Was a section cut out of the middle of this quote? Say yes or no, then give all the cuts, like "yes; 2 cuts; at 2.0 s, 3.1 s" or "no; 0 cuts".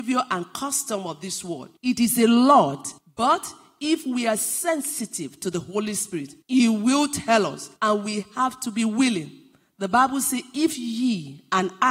yes; 4 cuts; at 1.8 s, 3.0 s, 6.4 s, 7.8 s